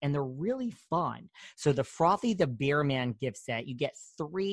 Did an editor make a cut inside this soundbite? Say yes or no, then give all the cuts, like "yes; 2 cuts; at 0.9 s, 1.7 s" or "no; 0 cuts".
no; 0 cuts